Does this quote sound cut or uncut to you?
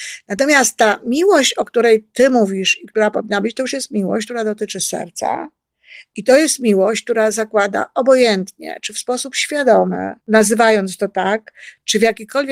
cut